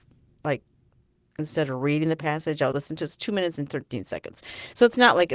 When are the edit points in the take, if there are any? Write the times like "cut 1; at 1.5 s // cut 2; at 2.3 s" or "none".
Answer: cut 1; at 2.7 s

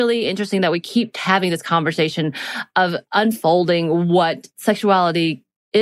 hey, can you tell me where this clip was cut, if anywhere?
none

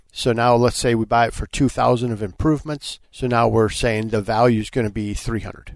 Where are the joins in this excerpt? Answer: cut 1; at 1.7 s // cut 2; at 3.0 s

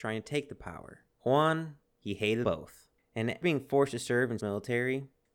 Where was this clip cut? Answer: cut 1; at 1.8 s // cut 2; at 2.4 s // cut 3; at 3.4 s // cut 4; at 4.4 s

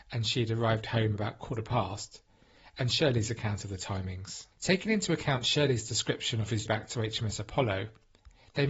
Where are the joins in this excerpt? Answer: cut 1; at 4.5 s // cut 2; at 6.7 s

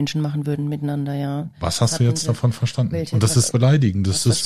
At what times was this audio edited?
cut 1; at 3.5 s

